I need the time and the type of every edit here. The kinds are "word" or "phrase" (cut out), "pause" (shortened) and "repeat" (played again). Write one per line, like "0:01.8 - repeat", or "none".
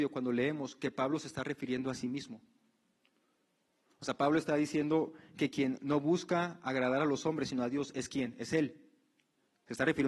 none